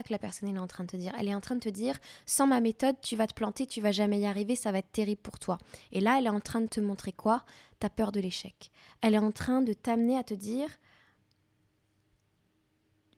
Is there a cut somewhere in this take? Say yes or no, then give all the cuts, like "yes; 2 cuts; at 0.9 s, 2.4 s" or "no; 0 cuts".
no; 0 cuts